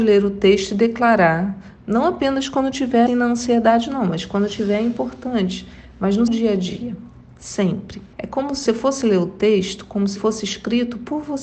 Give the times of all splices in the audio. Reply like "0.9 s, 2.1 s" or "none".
3.1 s, 6.3 s, 8.1 s, 8.7 s, 10.2 s